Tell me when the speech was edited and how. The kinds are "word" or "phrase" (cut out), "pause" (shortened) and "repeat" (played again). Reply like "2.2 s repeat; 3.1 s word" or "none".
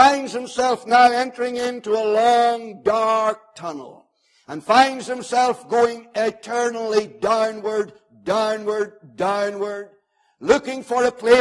none